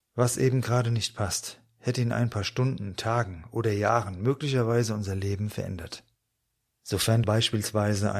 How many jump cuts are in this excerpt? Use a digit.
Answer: 1